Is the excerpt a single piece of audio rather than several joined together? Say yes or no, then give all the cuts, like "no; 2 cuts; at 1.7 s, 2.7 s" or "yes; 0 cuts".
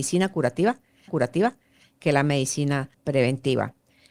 no; 2 cuts; at 1.1 s, 2.9 s